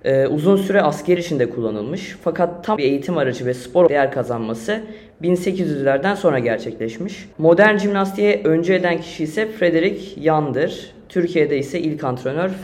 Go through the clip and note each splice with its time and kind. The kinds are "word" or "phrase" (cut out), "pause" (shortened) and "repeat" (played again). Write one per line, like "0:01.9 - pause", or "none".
0:01.2 - word
0:02.8 - word
0:03.9 - word
0:07.3 - pause